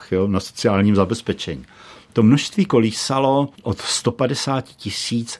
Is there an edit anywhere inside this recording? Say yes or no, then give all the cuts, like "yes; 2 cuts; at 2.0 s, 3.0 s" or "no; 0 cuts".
yes; 1 cut; at 3.5 s